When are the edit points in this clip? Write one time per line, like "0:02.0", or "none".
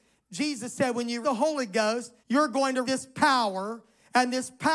0:01.2
0:02.2
0:02.8

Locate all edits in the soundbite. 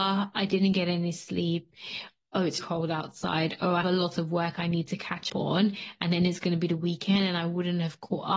0:02.6
0:03.8
0:05.3

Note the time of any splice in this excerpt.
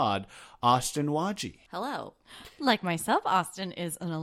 0:01.7

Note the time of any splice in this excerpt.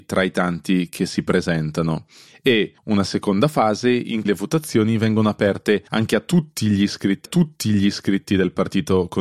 0:02.8
0:04.3
0:05.9
0:07.3

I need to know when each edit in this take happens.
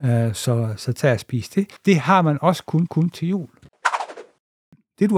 0:01.8
0:02.9

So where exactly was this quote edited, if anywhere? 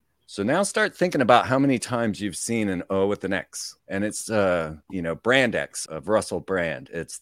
0:03.8
0:04.8
0:05.9

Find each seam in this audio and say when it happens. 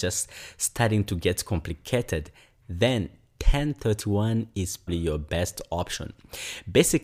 0:04.9

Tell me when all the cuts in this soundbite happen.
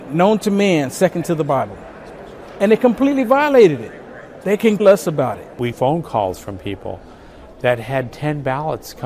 0:04.8
0:05.7

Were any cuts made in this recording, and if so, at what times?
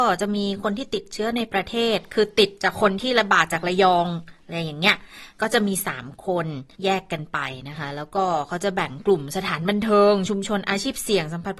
0:05.3
0:06.7

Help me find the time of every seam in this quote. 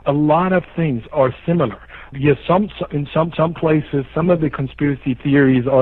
0:01.1
0:03.3

